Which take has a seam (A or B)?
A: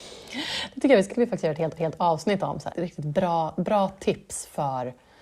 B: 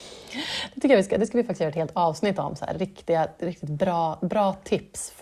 A